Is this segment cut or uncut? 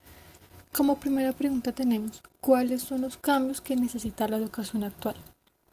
cut